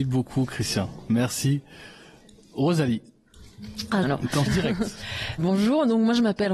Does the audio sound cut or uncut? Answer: cut